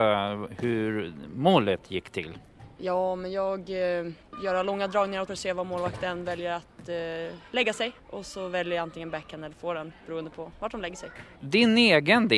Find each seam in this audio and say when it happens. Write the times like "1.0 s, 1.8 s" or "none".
5.3 s